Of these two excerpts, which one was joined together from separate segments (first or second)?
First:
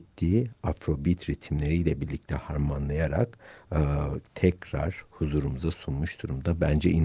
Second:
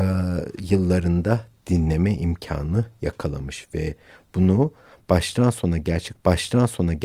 second